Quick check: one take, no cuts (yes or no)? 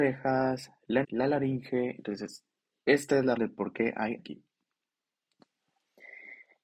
no